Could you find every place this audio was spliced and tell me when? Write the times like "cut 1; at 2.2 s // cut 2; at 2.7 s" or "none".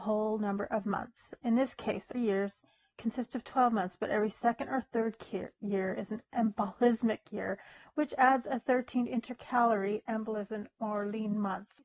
cut 1; at 2.1 s